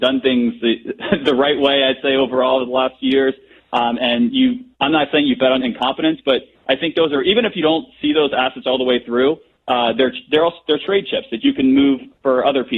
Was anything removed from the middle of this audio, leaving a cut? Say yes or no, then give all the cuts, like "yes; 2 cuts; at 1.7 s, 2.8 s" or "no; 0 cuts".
no; 0 cuts